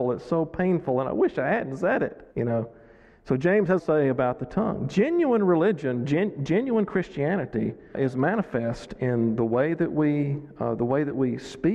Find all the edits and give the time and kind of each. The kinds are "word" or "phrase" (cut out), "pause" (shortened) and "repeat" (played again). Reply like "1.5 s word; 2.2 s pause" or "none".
2.3 s pause; 3.8 s phrase; 7.9 s word